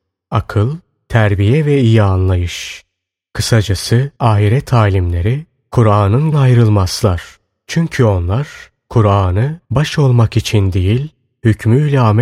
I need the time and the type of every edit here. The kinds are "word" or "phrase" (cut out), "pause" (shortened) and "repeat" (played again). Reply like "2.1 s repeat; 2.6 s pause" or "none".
4.2 s pause; 6.3 s phrase; 9.6 s pause